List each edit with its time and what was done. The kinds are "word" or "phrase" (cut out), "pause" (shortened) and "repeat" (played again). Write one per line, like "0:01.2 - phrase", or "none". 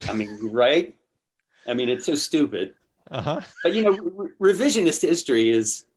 0:03.5 - pause